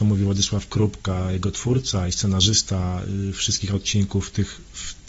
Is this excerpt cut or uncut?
uncut